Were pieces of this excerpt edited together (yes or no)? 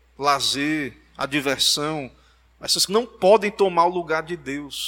yes